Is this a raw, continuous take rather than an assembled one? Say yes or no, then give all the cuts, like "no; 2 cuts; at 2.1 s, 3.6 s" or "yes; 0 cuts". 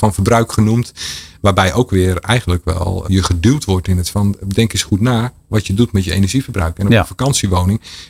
no; 2 cuts; at 3.0 s, 4.1 s